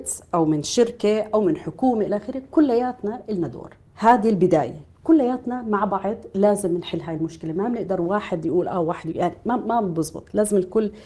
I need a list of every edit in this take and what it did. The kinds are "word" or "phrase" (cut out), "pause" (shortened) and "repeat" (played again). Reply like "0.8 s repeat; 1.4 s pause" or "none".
3.9 s pause